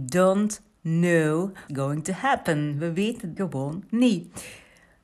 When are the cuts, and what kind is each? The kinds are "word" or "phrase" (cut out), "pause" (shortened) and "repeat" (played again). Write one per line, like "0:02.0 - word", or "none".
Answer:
0:01.7 - word
0:03.4 - word

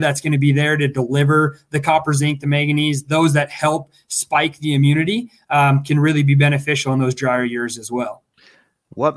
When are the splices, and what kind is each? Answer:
none

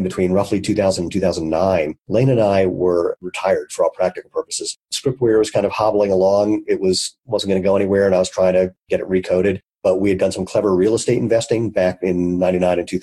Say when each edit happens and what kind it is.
0:02.0 - pause

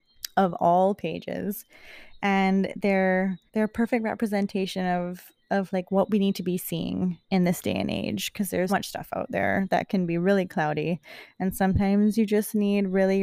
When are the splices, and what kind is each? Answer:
0:03.5 - pause
0:07.2 - pause
0:08.7 - word

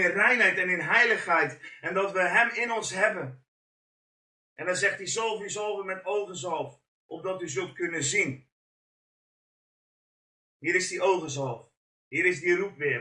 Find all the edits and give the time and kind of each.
none

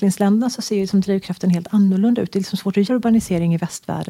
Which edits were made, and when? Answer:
0:02.9 - word

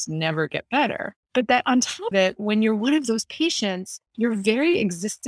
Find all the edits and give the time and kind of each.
0:01.2 - pause
0:02.1 - word
0:04.1 - pause

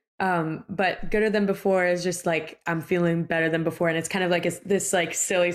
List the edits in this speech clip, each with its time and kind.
none

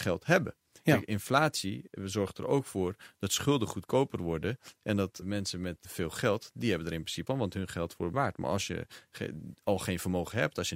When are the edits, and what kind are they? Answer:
0:05.2 - word
0:05.8 - word
0:07.3 - word
0:08.1 - word

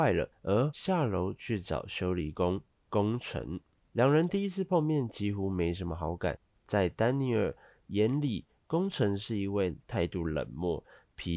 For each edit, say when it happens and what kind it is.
none

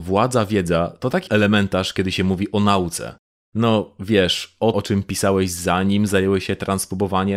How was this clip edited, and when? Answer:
0:01.3 - word
0:04.7 - word

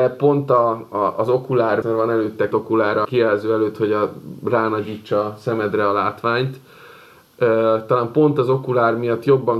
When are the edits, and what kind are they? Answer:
0:01.8 - word
0:02.5 - word
0:03.0 - word

